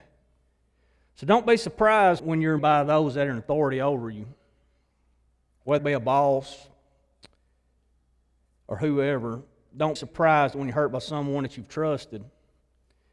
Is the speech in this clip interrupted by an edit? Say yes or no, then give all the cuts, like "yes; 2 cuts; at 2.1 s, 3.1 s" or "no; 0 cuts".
yes; 4 cuts; at 2.2 s, 2.6 s, 5.8 s, 10.0 s